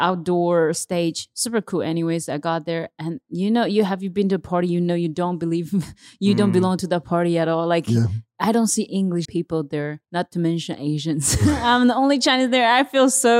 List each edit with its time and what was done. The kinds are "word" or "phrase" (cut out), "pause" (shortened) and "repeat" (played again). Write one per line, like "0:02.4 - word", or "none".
0:08.9 - word
0:09.2 - word
0:10.0 - pause

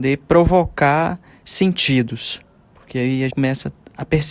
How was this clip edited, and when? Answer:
0:03.3 - word

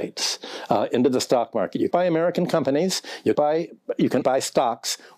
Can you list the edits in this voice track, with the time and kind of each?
0:01.9 - word
0:03.3 - word
0:04.2 - word

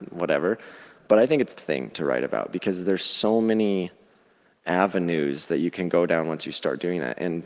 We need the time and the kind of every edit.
0:01.5 - phrase

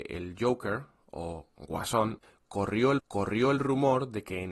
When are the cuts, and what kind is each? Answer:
0:03.0 - repeat

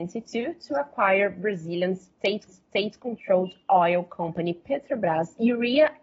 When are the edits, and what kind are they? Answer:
0:02.5 - repeat

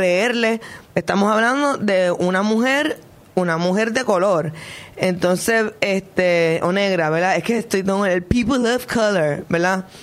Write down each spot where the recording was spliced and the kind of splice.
none

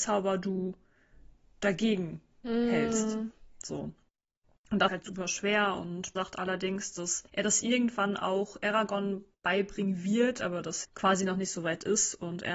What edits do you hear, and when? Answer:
0:04.9 - word
0:06.2 - word
0:07.3 - pause
0:10.8 - word

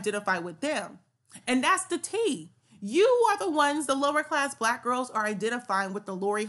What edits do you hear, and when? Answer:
none

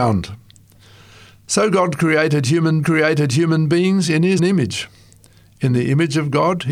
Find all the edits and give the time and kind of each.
0:02.8 - repeat
0:04.4 - word

